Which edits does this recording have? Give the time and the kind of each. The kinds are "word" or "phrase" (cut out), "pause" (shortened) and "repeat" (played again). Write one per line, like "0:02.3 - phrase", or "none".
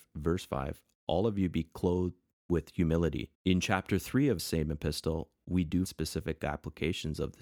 0:03.3 - pause
0:04.4 - word
0:05.8 - word